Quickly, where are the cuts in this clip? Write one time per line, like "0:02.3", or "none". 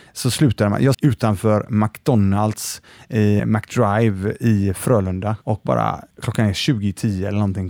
0:00.9
0:03.4
0:05.4
0:06.1